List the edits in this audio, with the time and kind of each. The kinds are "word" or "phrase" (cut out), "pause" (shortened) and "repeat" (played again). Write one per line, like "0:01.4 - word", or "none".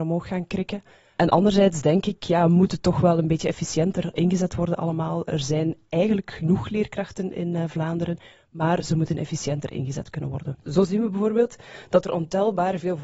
0:10.6 - pause